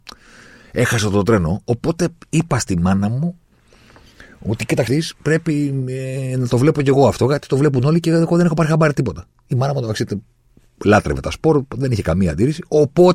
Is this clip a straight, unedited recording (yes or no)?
no